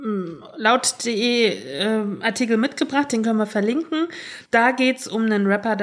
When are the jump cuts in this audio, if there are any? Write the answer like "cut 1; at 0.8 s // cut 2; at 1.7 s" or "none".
cut 1; at 4.5 s